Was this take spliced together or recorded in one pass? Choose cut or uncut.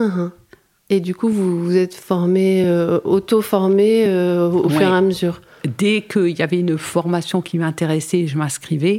uncut